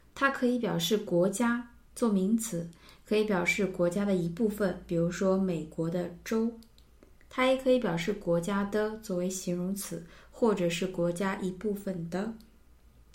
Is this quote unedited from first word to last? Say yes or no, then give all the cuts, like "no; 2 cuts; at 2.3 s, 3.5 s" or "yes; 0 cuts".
yes; 0 cuts